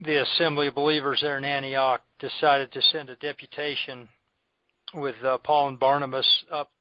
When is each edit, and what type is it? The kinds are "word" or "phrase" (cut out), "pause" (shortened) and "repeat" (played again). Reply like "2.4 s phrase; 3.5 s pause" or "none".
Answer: none